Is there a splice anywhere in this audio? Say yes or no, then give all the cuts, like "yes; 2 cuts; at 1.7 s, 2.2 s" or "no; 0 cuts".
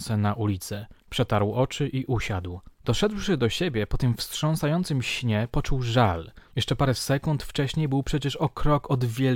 yes; 3 cuts; at 1.0 s, 2.7 s, 6.5 s